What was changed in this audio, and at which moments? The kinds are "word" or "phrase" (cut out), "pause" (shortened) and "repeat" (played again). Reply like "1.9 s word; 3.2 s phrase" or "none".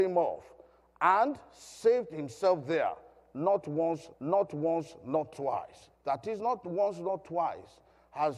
4.1 s repeat; 5.9 s pause